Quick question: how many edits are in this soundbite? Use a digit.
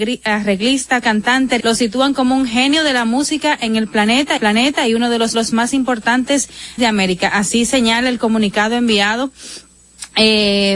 5